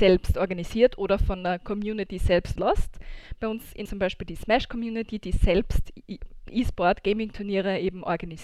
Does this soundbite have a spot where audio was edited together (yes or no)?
yes